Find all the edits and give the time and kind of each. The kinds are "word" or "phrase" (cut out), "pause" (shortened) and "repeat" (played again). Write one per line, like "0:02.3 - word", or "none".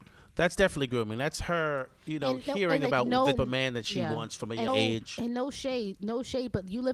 0:03.3 - word
0:04.7 - word